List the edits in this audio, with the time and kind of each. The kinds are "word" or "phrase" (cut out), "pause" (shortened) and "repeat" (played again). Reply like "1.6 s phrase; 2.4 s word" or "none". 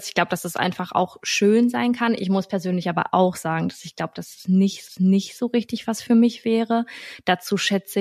4.9 s repeat